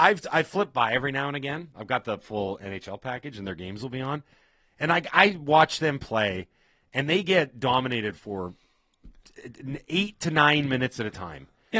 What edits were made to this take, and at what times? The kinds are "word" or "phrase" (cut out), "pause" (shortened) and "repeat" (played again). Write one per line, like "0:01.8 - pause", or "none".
none